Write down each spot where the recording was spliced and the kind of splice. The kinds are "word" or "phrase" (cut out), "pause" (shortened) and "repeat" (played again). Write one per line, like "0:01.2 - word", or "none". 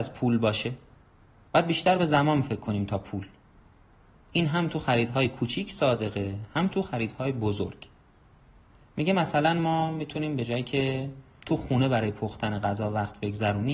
none